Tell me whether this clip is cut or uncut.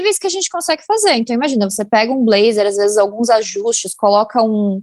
uncut